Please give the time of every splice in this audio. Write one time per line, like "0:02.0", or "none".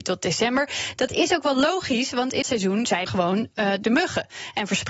0:02.4
0:03.1
0:03.8

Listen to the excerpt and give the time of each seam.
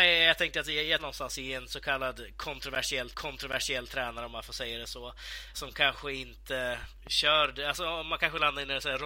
0:01.0
0:03.1
0:05.5
0:07.0

